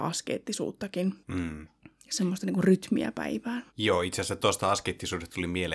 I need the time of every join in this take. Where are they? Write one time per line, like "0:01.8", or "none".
0:01.2
0:03.7